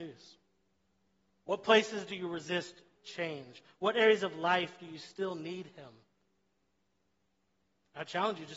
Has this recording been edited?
no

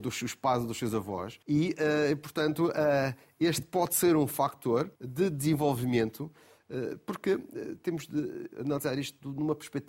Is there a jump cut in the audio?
yes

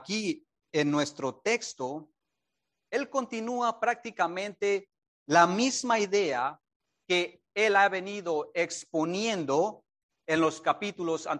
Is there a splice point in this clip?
no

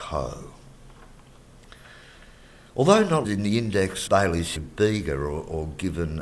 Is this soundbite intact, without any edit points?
no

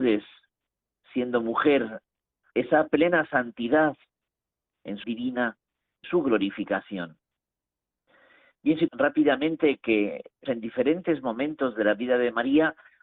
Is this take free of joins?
no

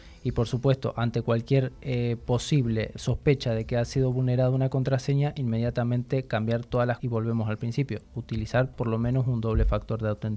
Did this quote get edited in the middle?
yes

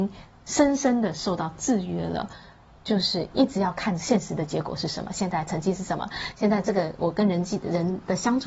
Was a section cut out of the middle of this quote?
no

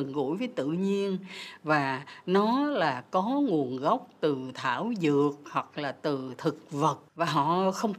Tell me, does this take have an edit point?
yes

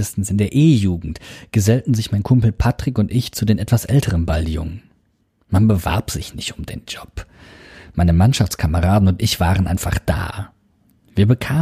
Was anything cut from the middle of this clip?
no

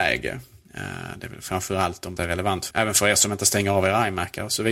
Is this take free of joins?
no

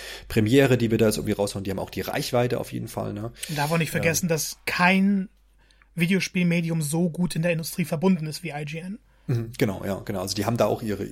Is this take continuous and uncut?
yes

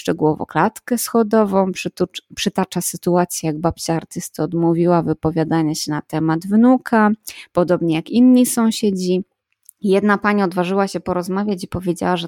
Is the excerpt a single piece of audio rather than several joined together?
yes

